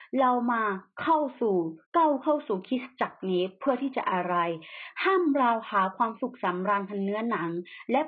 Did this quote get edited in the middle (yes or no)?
yes